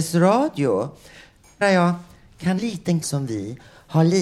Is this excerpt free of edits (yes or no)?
no